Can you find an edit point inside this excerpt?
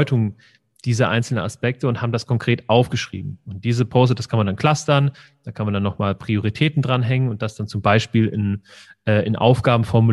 no; 0 cuts

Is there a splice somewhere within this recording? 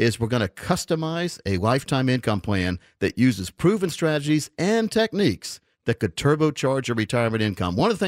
no; 0 cuts

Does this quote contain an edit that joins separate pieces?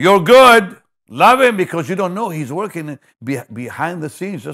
yes; 1 cut; at 3.1 s

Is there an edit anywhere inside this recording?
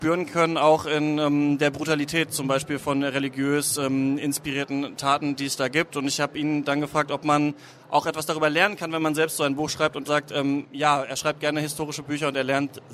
yes; 1 cut; at 10.0 s

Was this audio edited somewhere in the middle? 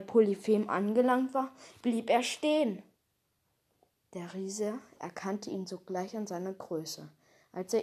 no; 0 cuts

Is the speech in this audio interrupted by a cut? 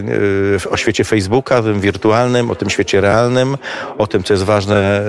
no; 0 cuts

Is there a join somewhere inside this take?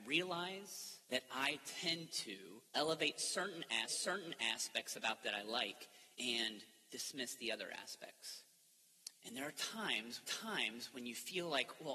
yes; 7 cuts; at 1.0 s, 2.7 s, 3.8 s, 5.2 s, 6.1 s, 9.2 s, 10.2 s

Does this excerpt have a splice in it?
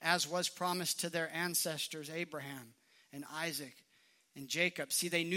no; 0 cuts

